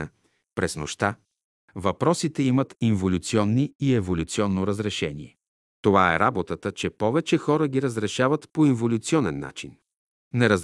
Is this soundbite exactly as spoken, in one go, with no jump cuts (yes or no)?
yes